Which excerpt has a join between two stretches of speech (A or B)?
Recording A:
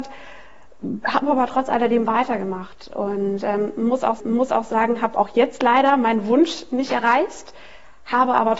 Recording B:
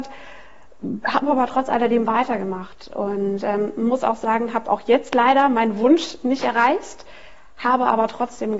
A